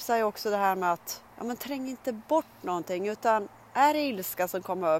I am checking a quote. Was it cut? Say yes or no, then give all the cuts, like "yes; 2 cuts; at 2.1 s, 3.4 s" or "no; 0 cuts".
yes; 1 cut; at 1.3 s